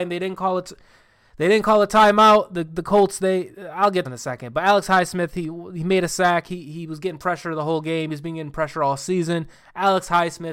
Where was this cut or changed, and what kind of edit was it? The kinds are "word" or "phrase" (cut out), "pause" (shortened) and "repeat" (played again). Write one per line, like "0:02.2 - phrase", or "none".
0:04.0 - phrase